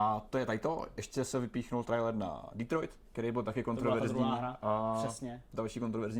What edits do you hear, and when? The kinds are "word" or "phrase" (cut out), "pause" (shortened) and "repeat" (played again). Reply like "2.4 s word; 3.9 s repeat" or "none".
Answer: none